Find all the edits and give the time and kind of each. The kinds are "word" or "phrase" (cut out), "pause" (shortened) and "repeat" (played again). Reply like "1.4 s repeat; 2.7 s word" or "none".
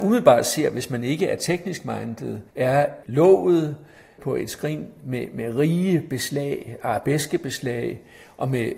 2.5 s pause